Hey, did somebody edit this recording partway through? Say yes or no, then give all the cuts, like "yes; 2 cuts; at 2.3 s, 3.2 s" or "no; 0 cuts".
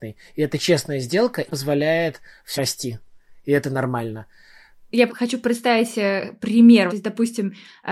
yes; 4 cuts; at 1.5 s, 2.6 s, 5.1 s, 6.9 s